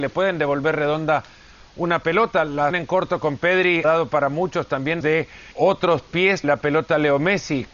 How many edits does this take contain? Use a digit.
5